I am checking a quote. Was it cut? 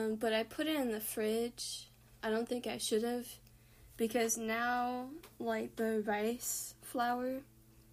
no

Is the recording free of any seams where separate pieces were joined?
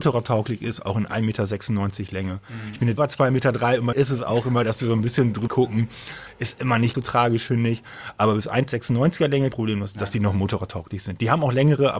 no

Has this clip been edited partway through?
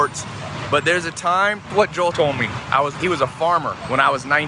yes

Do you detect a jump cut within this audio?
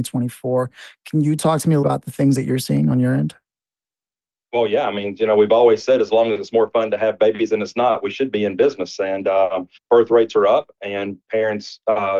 yes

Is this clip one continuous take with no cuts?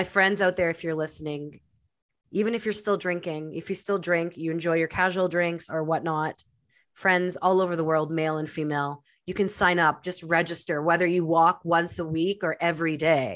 yes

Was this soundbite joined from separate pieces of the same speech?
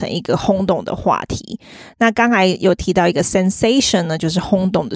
no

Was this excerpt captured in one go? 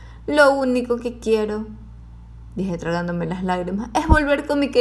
yes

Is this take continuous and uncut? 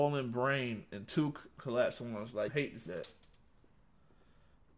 no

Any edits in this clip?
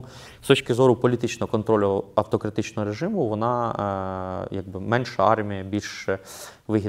no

